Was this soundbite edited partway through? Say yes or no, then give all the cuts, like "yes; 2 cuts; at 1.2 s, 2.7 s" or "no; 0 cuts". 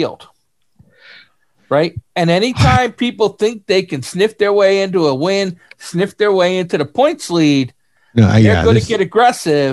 no; 0 cuts